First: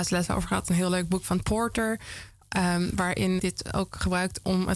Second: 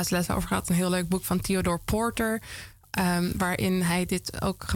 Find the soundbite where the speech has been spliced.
first; 2 cuts; at 1.4 s, 3.4 s

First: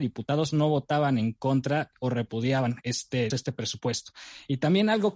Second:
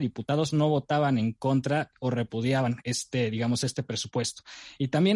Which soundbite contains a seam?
first; 1 cut; at 3.3 s

